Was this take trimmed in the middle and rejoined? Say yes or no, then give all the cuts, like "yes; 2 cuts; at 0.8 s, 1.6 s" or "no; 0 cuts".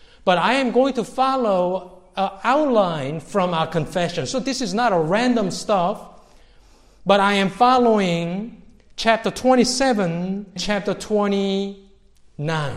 yes; 1 cut; at 10.6 s